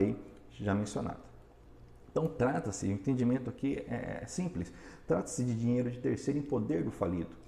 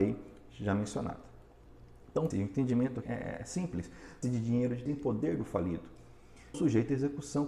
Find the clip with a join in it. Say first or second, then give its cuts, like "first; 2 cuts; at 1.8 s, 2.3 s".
second; 5 cuts; at 2.3 s, 3.0 s, 4.2 s, 4.9 s, 6.5 s